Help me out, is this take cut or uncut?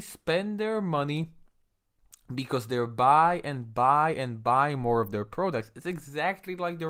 uncut